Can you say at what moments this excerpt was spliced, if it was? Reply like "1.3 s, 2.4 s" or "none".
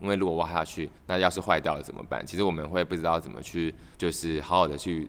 1.0 s, 3.9 s